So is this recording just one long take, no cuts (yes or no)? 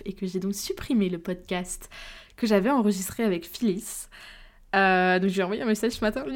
yes